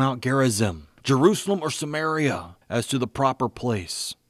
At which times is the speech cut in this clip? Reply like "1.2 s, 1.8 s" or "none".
1.0 s, 2.6 s